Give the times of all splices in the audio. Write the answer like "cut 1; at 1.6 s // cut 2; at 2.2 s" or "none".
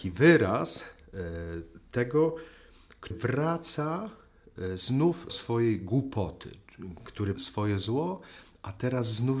cut 1; at 3.1 s // cut 2; at 5.3 s // cut 3; at 7.4 s